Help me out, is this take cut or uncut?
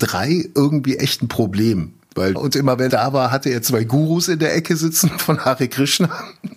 cut